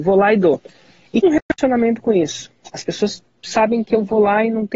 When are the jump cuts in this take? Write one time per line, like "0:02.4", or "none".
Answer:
0:01.2